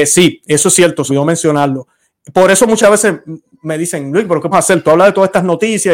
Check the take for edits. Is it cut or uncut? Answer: cut